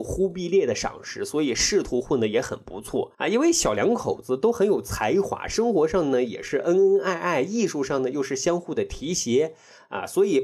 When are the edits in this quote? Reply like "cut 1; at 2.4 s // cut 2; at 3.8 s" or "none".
cut 1; at 3.1 s